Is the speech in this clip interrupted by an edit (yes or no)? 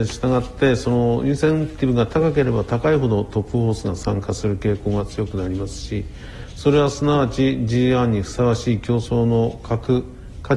no